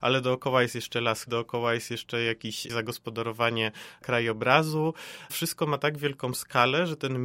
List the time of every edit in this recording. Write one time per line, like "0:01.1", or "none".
0:01.3
0:05.3